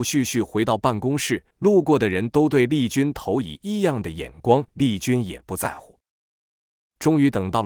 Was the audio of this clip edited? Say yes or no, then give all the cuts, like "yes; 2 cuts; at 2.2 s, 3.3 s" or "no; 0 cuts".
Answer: yes; 2 cuts; at 1.5 s, 4.7 s